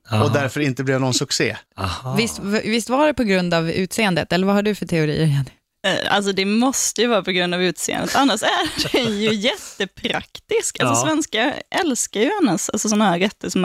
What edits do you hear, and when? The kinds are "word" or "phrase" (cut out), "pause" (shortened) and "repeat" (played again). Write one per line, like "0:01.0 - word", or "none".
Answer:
0:01.7 - pause